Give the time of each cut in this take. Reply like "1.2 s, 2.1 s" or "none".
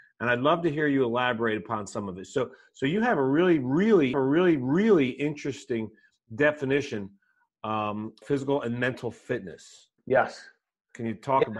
4.1 s, 8.2 s, 10.0 s